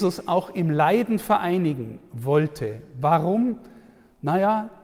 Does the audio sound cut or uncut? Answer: uncut